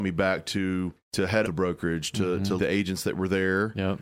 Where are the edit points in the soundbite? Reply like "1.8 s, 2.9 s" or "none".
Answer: 1.0 s, 1.4 s, 2.6 s